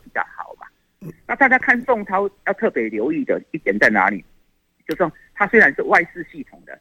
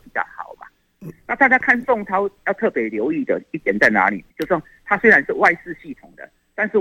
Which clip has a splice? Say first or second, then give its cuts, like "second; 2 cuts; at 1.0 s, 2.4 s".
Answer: second; 1 cut; at 4.3 s